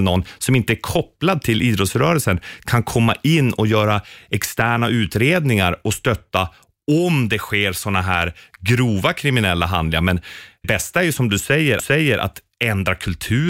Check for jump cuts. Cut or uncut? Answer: cut